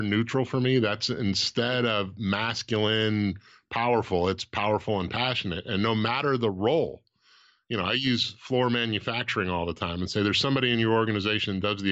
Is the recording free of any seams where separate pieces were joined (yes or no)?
yes